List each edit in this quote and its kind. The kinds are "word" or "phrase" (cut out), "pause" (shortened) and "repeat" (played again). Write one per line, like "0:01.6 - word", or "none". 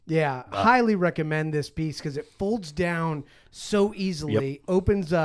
none